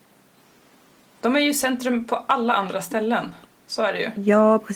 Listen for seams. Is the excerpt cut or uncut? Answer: uncut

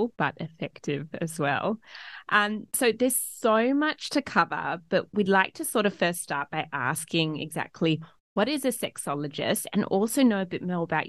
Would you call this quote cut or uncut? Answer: uncut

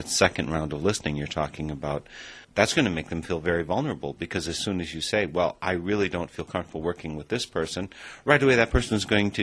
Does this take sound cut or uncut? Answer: cut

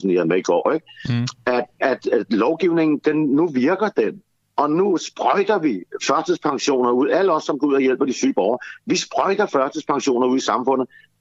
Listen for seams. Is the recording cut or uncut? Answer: cut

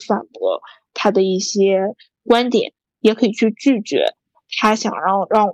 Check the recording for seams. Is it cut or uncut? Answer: uncut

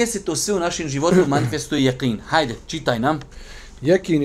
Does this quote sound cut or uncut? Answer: uncut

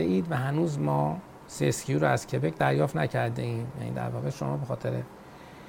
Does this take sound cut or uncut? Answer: uncut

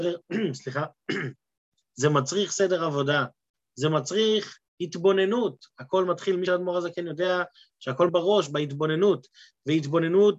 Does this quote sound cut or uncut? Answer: cut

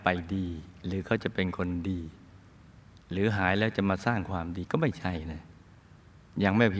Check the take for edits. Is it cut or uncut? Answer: uncut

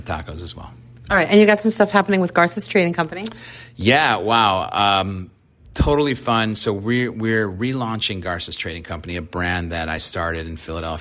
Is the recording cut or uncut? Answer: uncut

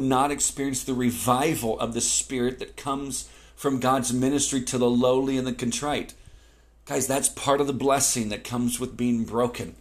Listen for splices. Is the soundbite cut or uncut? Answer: uncut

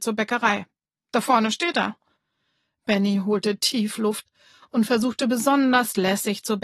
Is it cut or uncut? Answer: uncut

